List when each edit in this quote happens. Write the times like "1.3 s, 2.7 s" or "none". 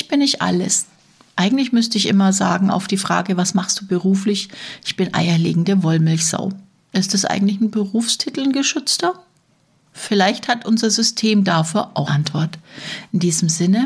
12.1 s